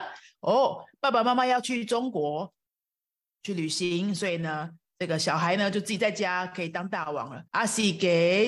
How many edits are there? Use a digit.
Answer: 1